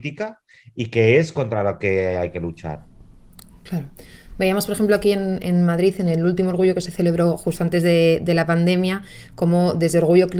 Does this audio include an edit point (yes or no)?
no